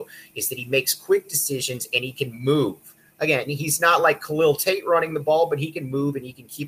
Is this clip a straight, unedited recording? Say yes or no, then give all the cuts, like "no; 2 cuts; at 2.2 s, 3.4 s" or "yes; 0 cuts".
yes; 0 cuts